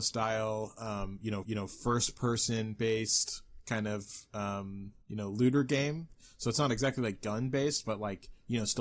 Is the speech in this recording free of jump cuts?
no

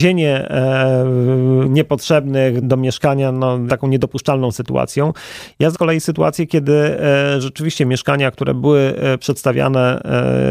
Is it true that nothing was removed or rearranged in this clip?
no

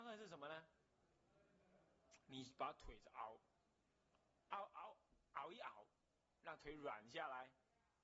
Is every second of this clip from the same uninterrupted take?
yes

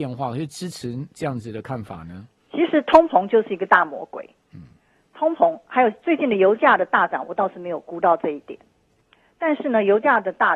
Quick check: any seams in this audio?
no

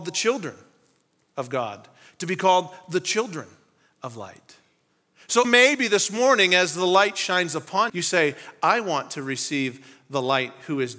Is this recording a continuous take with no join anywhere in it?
no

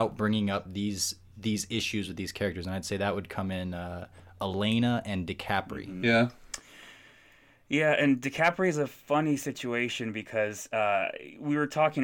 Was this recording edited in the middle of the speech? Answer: no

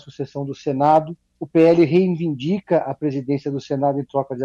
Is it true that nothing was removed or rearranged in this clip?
no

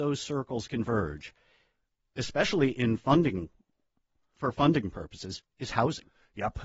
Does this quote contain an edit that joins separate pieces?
no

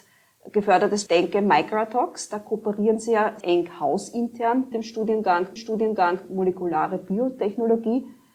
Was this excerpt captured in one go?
no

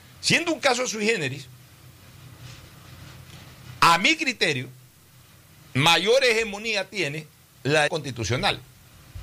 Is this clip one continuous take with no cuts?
no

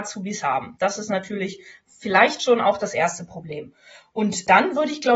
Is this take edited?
no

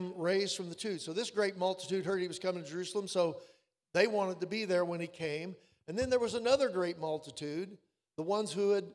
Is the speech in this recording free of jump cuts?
yes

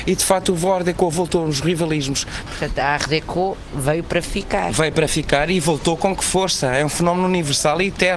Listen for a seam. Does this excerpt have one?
no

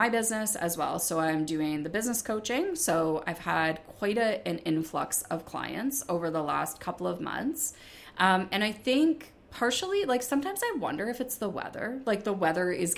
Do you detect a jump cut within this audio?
no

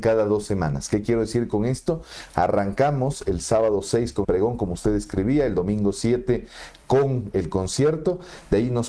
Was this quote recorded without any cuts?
no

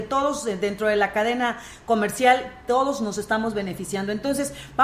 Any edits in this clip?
no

